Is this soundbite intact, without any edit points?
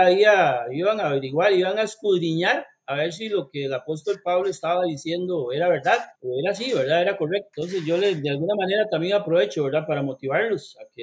no; 2 cuts; at 6.2 s, 7.5 s

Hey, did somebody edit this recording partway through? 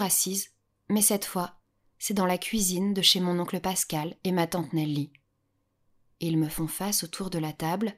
no; 0 cuts

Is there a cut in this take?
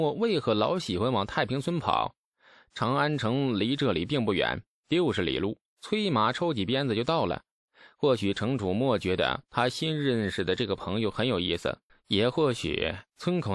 yes; 1 cut; at 11.9 s

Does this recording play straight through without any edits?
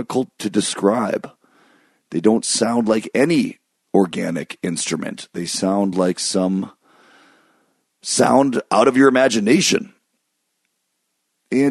yes; 0 cuts

